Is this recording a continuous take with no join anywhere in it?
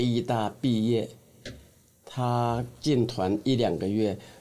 yes; 0 cuts

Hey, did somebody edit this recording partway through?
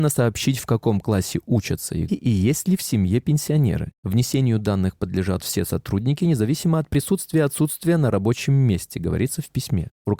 yes; 1 cut; at 2.1 s

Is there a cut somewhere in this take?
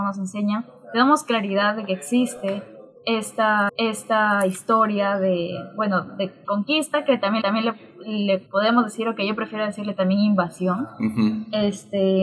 yes; 4 cuts; at 3.7 s, 6.4 s, 7.4 s, 8.5 s

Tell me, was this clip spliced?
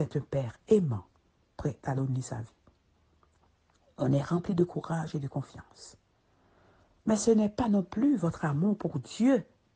no; 0 cuts

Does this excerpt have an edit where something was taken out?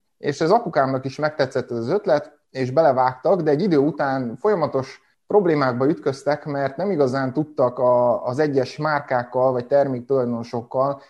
no; 0 cuts

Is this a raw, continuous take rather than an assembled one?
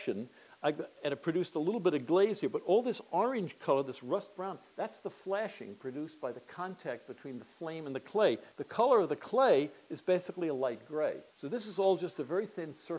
no; 2 cuts; at 8.5 s, 11.3 s

